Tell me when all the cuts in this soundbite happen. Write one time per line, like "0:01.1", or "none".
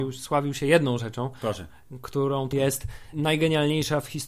0:02.5
0:03.1